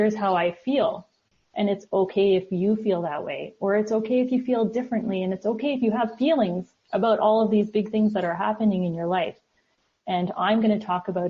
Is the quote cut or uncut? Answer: uncut